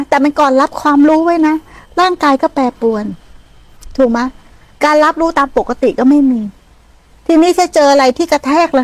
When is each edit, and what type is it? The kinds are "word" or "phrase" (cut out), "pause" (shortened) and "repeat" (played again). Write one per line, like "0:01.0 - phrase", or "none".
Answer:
none

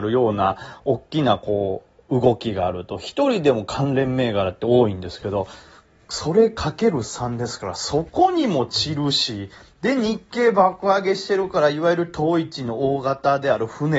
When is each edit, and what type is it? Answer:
none

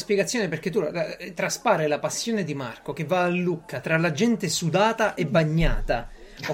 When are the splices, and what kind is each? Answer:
none

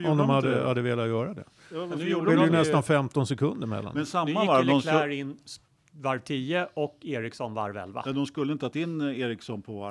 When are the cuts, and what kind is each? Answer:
0:08.7 - word

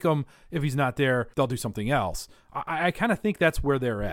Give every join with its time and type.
0:01.3 - pause

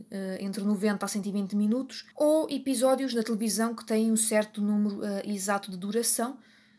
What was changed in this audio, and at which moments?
0:02.1 - pause

